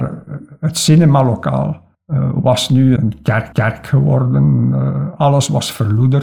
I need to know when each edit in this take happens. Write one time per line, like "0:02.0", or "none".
0:01.9
0:03.0
0:03.5